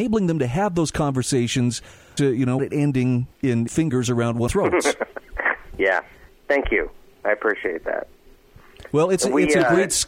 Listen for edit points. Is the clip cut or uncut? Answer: cut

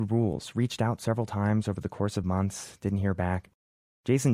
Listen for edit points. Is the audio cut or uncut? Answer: uncut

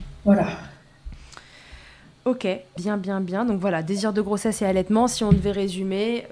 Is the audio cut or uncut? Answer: uncut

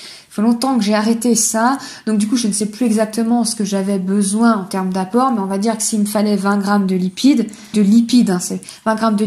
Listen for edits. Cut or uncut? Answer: cut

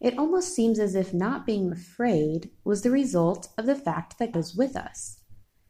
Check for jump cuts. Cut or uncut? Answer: cut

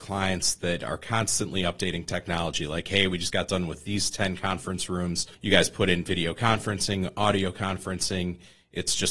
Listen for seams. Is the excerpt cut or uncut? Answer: cut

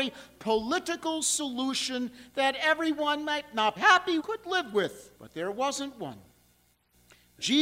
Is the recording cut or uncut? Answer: cut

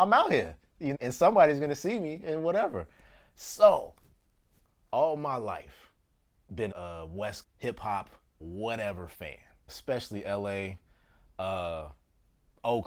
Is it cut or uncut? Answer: cut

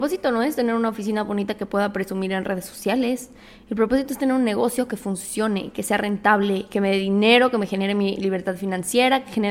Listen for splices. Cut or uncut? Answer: uncut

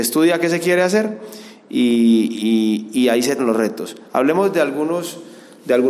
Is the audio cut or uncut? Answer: cut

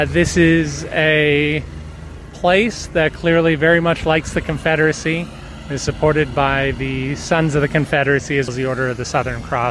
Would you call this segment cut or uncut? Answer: cut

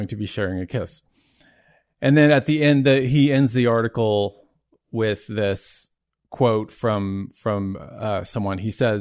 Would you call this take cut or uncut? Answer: uncut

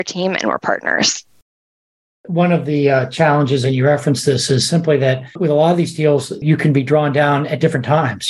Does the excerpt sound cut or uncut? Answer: uncut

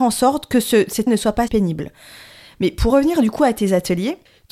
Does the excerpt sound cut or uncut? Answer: cut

